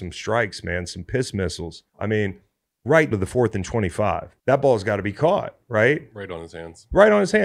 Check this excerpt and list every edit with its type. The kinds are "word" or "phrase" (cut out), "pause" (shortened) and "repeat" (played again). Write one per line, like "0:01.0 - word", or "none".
0:01.9 - pause
0:03.1 - word
0:04.4 - pause